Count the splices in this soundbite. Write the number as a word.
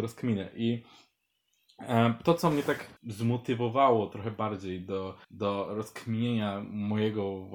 two